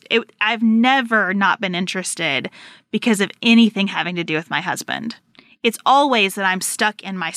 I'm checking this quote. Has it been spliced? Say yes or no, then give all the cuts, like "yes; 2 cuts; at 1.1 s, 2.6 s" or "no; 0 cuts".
no; 0 cuts